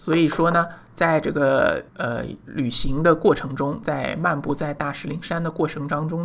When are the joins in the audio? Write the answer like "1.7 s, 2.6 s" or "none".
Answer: 1.9 s